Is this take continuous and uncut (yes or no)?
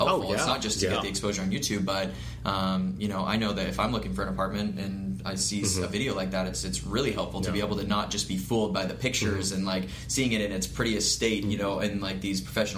yes